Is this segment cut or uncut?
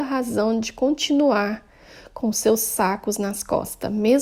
uncut